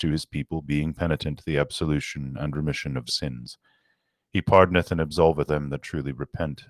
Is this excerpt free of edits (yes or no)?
no